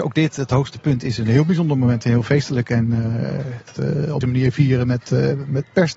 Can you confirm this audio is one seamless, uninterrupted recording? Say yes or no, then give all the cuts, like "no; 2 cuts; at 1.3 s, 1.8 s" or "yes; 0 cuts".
no; 2 cuts; at 3.8 s, 4.2 s